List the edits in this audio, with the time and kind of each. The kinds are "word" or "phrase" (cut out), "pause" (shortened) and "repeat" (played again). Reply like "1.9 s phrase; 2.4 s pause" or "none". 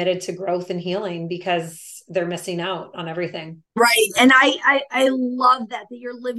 3.7 s pause